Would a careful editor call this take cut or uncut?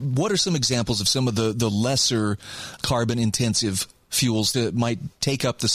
cut